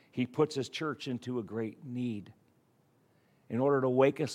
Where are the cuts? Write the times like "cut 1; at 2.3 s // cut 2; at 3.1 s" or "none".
none